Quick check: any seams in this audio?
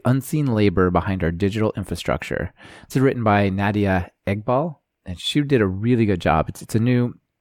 no; 0 cuts

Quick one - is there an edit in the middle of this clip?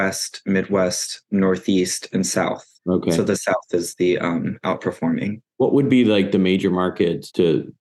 yes; 2 cuts; at 2.7 s, 5.5 s

